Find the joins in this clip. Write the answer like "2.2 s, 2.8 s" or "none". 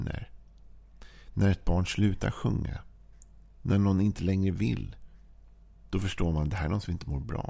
none